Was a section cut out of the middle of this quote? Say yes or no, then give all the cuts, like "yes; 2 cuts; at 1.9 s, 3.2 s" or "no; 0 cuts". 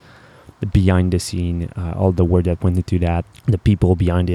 yes; 1 cut; at 3.3 s